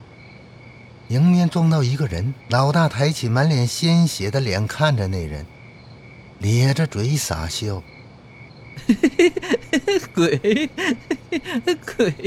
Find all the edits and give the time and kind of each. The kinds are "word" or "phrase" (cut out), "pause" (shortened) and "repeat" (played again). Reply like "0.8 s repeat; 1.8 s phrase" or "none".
2.4 s pause; 8.5 s pause